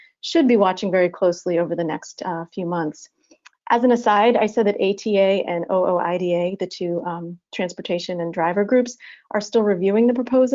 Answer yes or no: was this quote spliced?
no